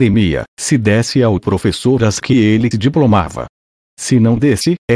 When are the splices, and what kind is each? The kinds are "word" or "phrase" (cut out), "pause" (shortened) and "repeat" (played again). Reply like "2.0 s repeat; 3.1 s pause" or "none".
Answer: 2.2 s word; 2.7 s phrase